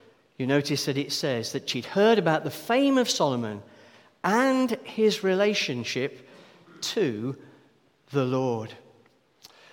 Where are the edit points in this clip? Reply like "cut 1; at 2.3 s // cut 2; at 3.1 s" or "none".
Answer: none